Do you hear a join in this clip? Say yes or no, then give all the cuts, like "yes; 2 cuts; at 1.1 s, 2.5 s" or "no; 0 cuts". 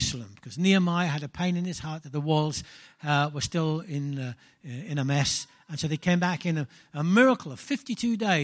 no; 0 cuts